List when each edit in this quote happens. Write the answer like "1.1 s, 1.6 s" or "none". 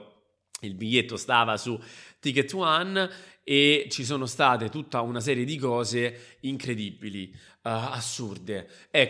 none